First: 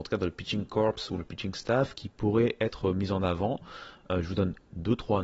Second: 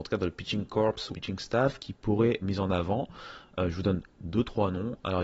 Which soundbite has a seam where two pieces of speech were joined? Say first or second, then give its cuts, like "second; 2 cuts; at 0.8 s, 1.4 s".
second; 2 cuts; at 1.1 s, 2.4 s